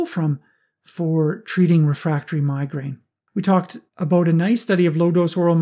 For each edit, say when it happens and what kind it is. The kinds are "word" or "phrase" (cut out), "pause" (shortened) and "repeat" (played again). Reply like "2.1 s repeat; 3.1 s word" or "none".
3.9 s pause